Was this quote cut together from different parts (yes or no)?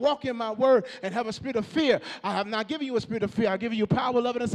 no